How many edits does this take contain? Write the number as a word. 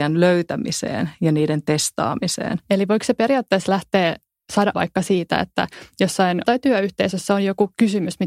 three